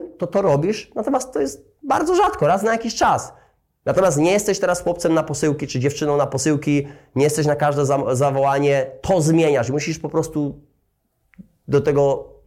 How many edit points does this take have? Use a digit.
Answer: 0